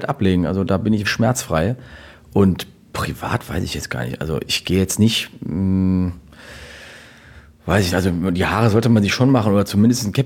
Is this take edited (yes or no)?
yes